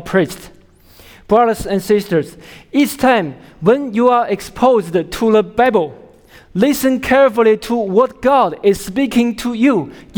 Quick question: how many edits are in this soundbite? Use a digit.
0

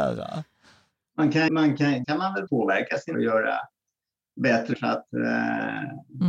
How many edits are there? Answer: 5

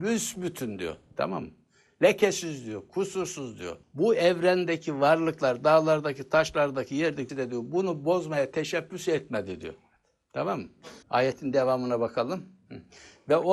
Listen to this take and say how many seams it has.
3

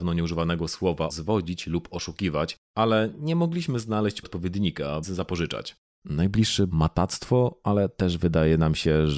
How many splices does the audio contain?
4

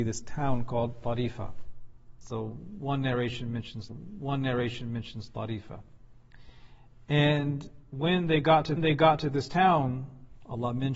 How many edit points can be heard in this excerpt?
2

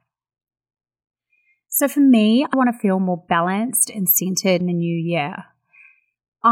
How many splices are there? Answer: 2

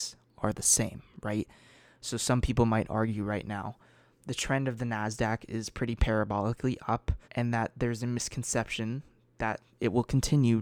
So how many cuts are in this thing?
1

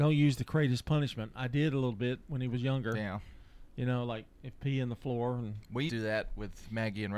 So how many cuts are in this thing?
1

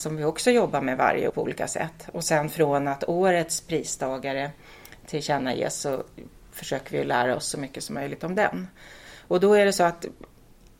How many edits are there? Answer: 1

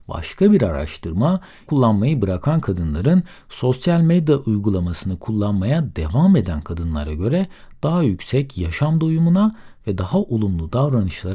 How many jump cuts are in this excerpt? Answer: 1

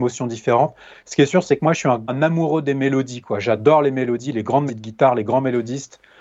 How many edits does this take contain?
2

